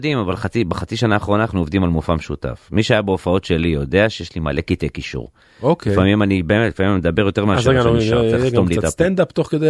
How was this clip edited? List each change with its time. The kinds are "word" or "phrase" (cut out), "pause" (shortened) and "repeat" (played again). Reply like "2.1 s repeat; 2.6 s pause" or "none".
none